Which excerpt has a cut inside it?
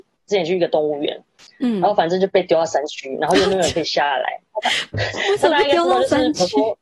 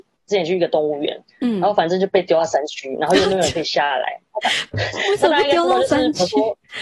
second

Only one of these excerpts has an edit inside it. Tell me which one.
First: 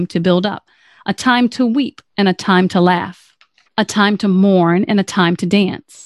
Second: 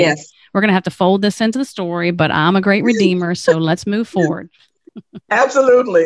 first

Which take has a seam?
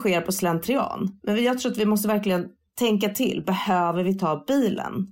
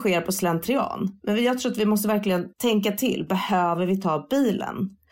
second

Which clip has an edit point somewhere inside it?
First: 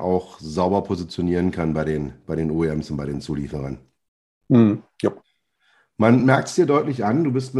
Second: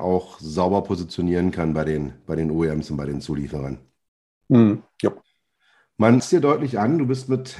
second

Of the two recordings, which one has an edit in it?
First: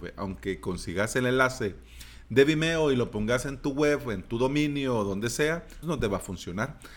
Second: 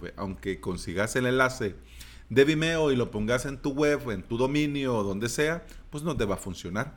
first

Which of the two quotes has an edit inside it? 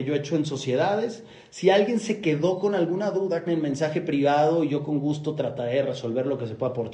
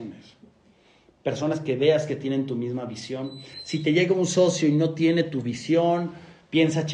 first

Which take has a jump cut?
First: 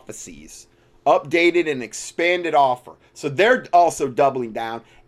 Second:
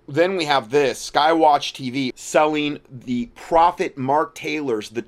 second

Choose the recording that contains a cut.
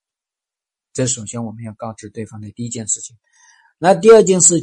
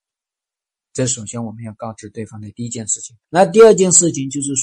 second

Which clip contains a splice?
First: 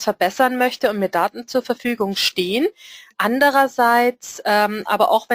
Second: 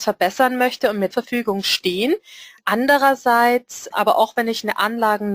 second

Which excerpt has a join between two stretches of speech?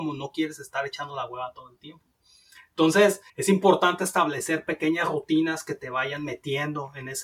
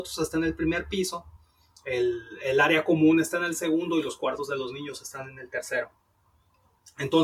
first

